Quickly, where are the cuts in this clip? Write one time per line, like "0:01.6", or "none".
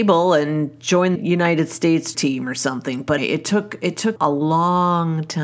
0:01.2
0:02.1
0:03.2
0:04.2